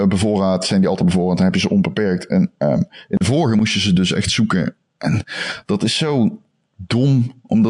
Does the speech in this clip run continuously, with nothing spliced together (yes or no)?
yes